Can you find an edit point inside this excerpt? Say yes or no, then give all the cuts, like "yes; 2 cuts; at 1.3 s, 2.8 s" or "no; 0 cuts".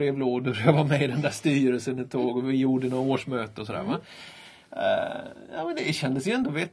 no; 0 cuts